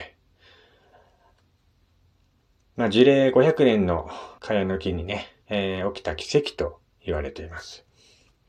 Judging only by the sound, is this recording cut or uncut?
cut